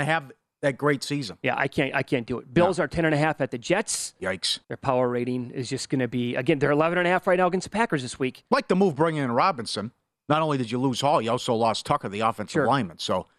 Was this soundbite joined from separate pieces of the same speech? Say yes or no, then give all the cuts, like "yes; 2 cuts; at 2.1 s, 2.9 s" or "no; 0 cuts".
yes; 1 cut; at 4.6 s